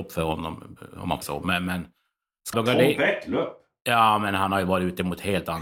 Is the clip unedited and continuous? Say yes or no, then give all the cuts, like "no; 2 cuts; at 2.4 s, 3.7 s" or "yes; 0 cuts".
no; 2 cuts; at 1.2 s, 2.5 s